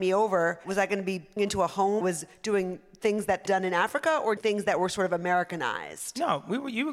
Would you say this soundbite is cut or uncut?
cut